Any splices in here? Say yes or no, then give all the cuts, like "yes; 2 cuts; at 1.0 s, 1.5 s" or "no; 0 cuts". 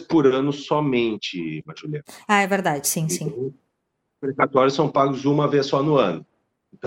no; 0 cuts